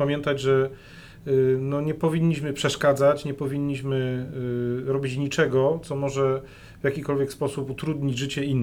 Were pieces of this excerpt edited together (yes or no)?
no